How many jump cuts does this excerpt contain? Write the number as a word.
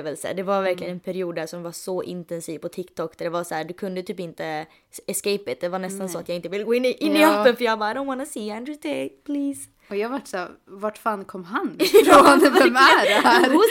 zero